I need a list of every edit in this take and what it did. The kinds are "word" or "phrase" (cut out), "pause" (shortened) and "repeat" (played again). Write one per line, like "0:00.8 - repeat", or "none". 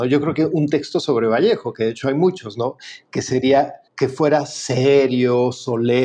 0:03.9 - pause

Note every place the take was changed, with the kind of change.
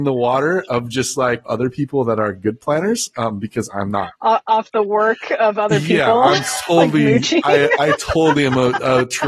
0:01.5 - phrase

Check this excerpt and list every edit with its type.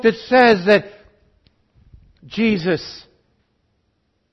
none

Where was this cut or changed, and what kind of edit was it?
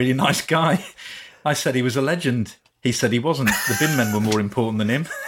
none

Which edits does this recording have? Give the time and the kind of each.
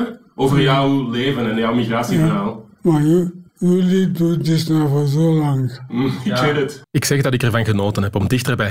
0:03.5 - pause
0:06.8 - pause

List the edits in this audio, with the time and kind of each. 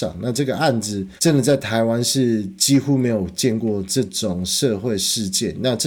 0:01.2 - pause

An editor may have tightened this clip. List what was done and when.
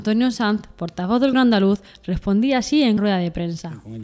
0:01.3 - word
0:03.0 - word

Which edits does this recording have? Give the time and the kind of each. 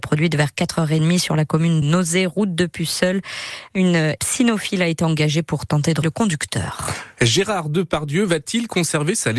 0:01.8 - word
0:04.2 - word
0:06.0 - word

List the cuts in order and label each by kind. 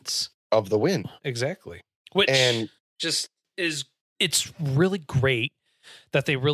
0:01.2 - pause

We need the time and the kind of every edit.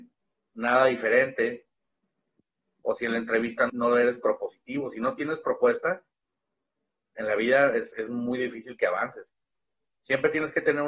0:03.7 - word

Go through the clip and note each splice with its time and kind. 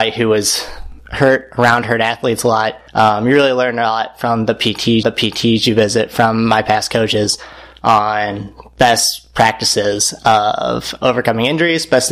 0:01.0 - pause
0:02.9 - pause
0:05.0 - repeat

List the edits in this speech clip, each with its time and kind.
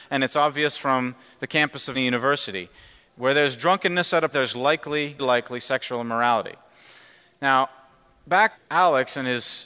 0:01.9 - word
0:04.3 - word
0:05.2 - word
0:08.5 - word

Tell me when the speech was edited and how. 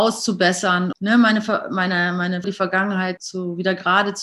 0:00.9 - word
0:02.4 - word
0:03.2 - word

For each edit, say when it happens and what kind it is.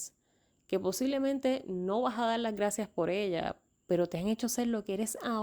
0:03.7 - pause

